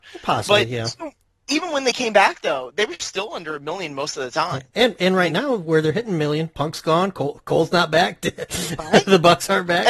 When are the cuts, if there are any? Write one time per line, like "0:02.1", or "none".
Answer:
none